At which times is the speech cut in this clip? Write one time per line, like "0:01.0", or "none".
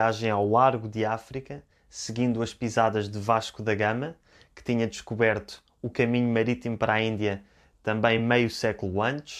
none